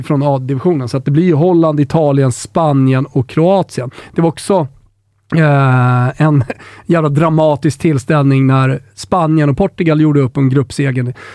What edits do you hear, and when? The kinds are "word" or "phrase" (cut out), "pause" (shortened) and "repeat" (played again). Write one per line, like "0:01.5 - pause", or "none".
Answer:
none